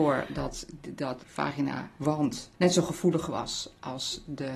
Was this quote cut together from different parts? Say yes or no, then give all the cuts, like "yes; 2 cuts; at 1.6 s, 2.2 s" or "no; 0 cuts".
yes; 2 cuts; at 1.2 s, 2.6 s